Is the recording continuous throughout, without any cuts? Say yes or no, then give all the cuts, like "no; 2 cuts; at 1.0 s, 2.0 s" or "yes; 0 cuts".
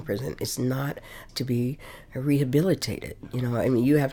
no; 1 cut; at 1.3 s